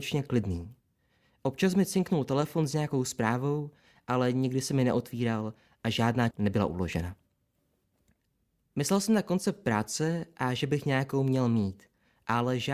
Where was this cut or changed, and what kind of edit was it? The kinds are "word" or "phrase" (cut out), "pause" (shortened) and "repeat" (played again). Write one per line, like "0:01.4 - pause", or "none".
0:06.3 - word